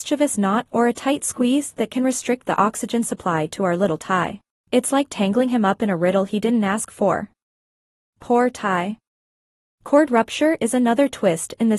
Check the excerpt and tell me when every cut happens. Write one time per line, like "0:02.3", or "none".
0:04.5